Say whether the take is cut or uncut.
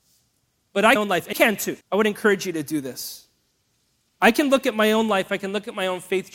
cut